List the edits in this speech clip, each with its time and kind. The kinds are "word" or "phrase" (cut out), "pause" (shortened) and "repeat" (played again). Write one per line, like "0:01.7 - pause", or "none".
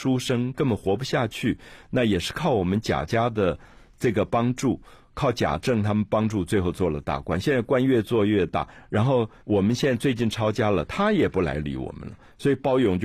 0:09.4 - pause